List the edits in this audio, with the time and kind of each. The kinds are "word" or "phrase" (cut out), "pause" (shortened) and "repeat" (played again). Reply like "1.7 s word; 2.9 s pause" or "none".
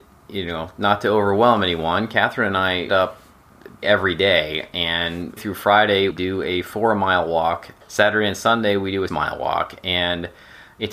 2.9 s word; 3.8 s word; 5.4 s word; 6.1 s word; 7.8 s word; 9.1 s word

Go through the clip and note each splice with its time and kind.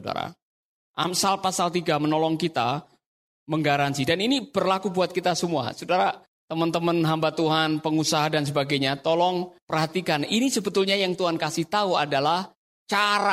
none

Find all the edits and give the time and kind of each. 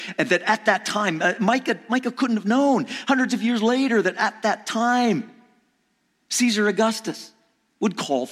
none

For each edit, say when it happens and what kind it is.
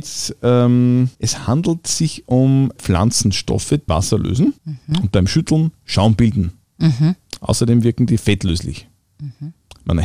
1.1 s pause; 2.8 s word; 3.9 s phrase; 4.6 s pause

